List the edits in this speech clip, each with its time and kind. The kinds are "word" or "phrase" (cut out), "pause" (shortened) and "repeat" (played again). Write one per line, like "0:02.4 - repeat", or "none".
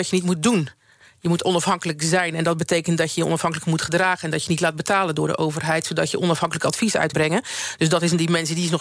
0:07.1 - word